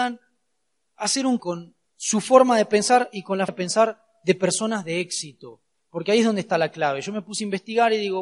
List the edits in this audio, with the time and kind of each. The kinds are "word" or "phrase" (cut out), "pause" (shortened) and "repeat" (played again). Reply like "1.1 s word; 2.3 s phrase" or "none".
1.4 s word; 1.8 s pause; 3.5 s word; 5.7 s pause